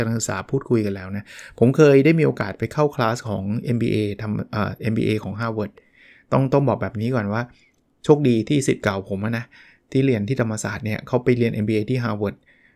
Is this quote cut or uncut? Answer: uncut